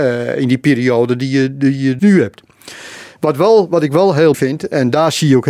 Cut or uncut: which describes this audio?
cut